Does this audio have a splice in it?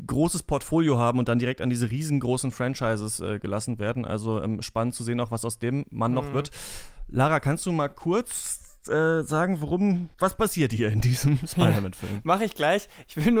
yes; 1 cut; at 10.1 s

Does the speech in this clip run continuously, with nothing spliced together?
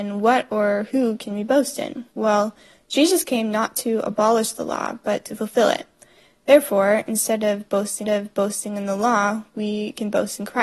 no; 2 cuts; at 2.1 s, 8.0 s

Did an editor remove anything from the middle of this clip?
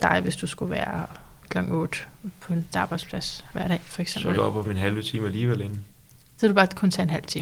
yes; 3 cuts; at 2.7 s, 4.3 s, 4.6 s

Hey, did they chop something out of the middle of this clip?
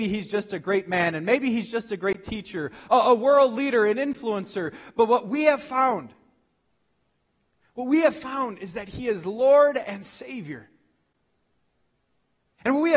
no; 0 cuts

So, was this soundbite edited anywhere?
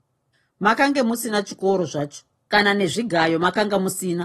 no; 0 cuts

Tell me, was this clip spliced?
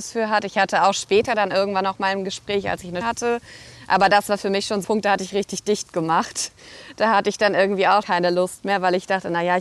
yes; 3 cuts; at 3.0 s, 4.8 s, 8.0 s

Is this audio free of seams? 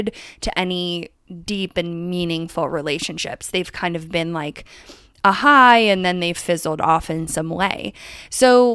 yes; 0 cuts

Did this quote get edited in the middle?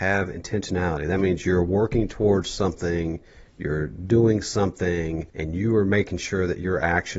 yes; 1 cut; at 5.3 s

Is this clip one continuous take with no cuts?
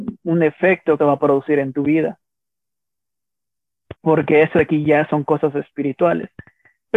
no; 2 cuts; at 1.0 s, 4.0 s

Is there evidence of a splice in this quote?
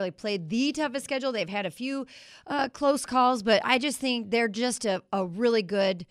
no; 0 cuts

